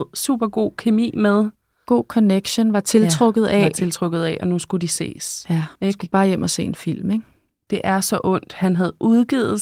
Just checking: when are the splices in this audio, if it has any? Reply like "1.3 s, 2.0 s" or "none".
5.8 s